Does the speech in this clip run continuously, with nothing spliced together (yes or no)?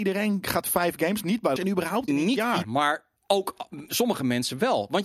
no